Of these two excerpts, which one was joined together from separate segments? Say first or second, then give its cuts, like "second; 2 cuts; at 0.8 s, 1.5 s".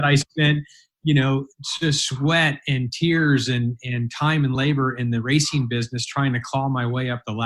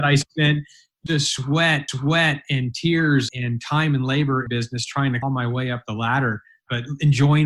second; 5 cuts; at 1.1 s, 1.9 s, 3.3 s, 4.5 s, 5.2 s